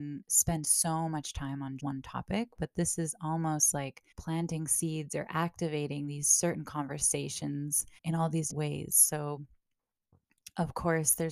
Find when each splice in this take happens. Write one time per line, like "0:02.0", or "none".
0:01.8
0:04.1
0:08.0
0:08.5